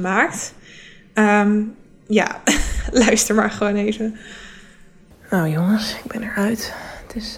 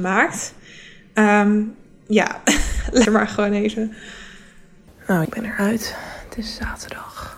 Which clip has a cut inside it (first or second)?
second